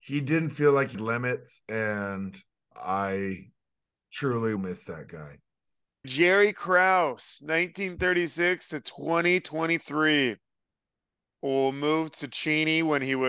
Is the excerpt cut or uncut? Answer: cut